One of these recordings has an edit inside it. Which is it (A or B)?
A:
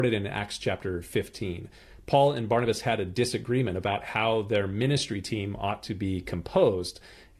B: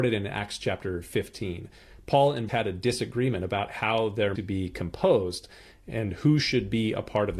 B